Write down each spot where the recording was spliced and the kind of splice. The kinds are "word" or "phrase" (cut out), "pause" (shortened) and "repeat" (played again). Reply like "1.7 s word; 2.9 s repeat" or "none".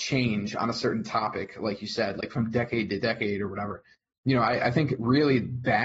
none